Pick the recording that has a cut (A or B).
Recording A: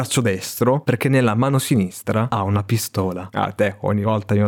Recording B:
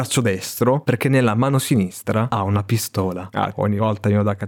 B